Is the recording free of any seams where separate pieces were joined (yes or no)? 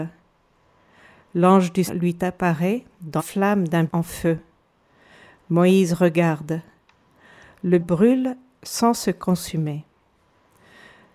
no